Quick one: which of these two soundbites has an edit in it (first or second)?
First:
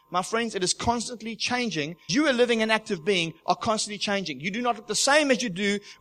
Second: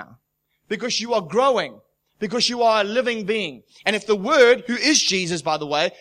first